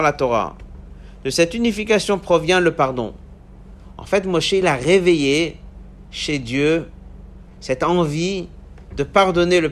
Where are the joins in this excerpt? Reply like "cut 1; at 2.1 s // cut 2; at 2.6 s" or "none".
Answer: none